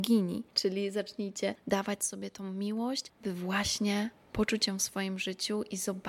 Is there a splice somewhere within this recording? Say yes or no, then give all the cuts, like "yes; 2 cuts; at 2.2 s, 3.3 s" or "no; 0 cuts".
no; 0 cuts